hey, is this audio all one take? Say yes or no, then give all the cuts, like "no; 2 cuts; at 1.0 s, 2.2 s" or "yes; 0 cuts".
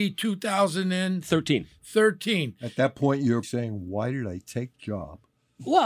no; 2 cuts; at 3.4 s, 4.7 s